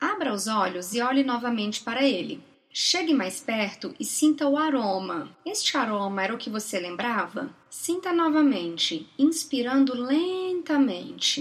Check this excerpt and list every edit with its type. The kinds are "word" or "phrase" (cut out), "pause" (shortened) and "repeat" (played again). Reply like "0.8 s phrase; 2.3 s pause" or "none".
none